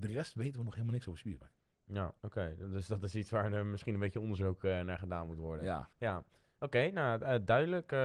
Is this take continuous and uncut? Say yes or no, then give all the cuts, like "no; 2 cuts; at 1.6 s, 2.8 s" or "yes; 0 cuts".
no; 3 cuts; at 2.2 s, 2.6 s, 5.9 s